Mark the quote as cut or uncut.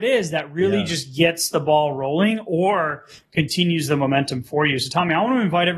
uncut